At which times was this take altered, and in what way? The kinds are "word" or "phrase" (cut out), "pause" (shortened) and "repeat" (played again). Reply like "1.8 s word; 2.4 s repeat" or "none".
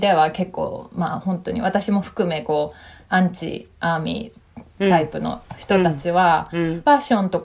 3.0 s pause

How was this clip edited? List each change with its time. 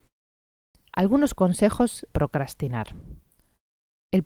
2.1 s phrase

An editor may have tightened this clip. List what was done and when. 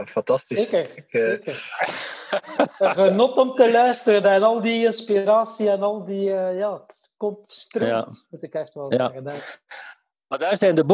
none

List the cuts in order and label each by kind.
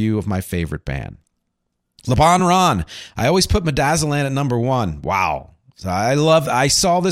none

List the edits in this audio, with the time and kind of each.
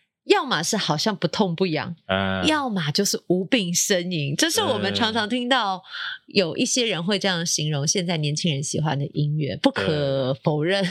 none

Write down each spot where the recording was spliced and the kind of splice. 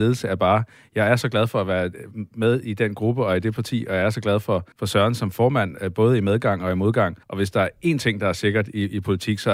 4.7 s pause; 7.2 s pause

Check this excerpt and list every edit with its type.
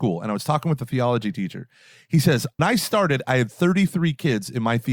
2.6 s word

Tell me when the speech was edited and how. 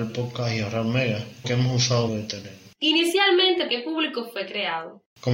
1.4 s word; 2.1 s phrase; 3.7 s word

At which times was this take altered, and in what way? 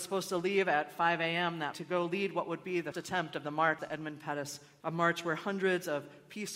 1.7 s word; 2.9 s word; 3.8 s word; 4.8 s word

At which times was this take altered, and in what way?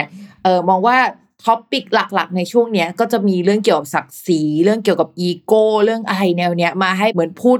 none

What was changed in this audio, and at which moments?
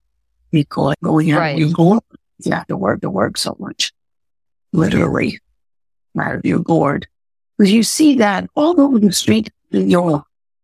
3.0 s repeat

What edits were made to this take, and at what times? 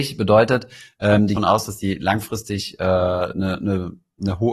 1.4 s phrase

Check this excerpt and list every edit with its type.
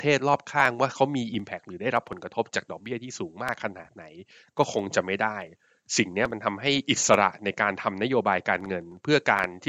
none

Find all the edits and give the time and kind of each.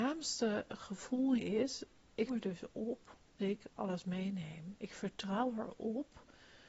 1.4 s word; 2.3 s word; 3.4 s word

